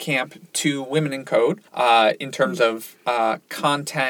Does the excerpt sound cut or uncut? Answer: cut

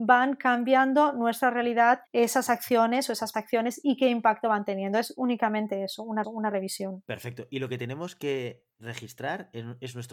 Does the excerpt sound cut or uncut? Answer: cut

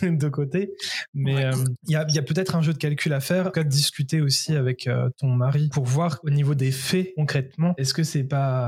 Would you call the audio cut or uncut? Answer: cut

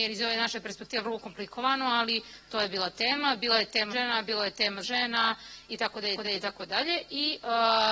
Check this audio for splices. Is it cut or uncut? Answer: cut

